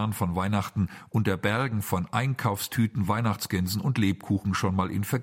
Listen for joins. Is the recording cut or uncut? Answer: uncut